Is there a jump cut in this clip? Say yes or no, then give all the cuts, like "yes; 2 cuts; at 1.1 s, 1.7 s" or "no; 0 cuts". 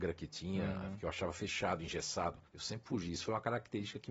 yes; 1 cut; at 2.5 s